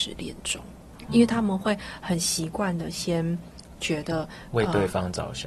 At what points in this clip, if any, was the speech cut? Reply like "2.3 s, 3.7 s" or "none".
1.1 s

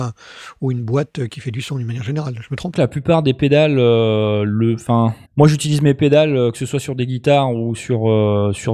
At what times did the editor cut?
2.7 s, 5.2 s

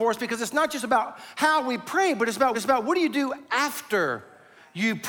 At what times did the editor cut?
2.5 s

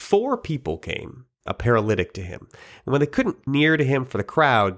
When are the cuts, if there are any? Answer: 1.5 s, 3.5 s

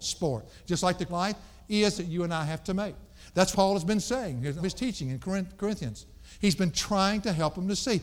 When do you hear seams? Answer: 1.1 s, 1.9 s, 3.5 s, 4.6 s

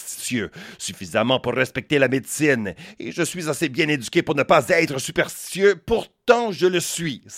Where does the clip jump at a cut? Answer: none

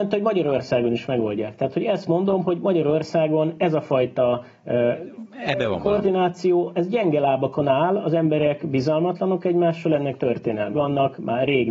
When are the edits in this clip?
10.7 s

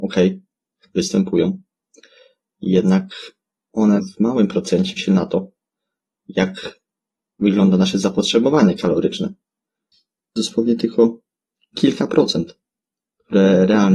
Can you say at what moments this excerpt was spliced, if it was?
4.0 s, 5.0 s, 10.4 s

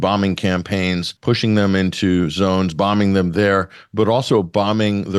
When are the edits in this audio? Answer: 1.2 s

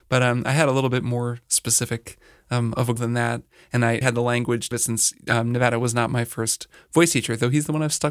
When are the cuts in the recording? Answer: 3.0 s, 4.0 s, 4.7 s

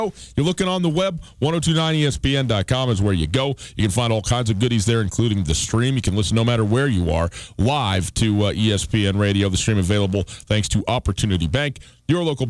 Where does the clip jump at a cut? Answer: none

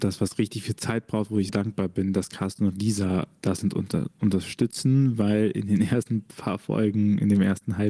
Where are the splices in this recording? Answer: 1.5 s

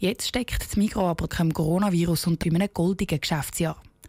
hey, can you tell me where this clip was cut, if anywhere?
1.3 s, 2.4 s

